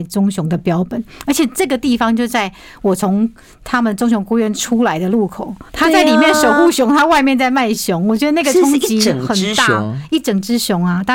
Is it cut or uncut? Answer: cut